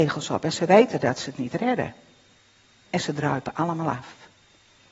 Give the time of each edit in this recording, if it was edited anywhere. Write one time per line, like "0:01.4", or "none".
none